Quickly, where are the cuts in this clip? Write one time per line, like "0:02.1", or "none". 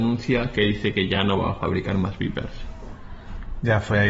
none